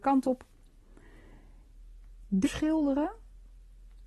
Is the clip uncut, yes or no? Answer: no